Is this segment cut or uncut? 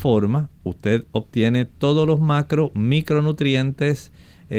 uncut